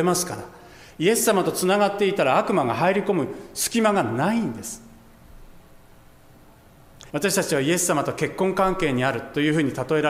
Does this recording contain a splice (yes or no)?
yes